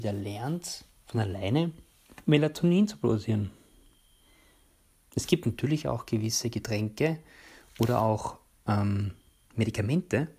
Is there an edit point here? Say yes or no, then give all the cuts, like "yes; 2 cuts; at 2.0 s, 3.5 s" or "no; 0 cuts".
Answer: no; 0 cuts